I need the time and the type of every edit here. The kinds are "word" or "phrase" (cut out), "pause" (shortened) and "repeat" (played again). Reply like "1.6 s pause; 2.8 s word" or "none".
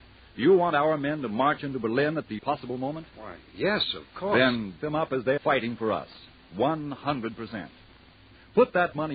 2.4 s word; 4.8 s word; 5.4 s word